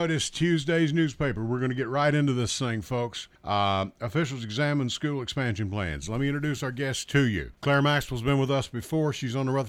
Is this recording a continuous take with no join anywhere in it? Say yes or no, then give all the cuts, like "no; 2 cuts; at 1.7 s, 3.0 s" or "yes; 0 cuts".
no; 2 cuts; at 3.3 s, 7.6 s